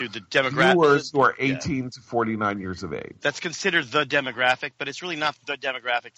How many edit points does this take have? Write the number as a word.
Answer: zero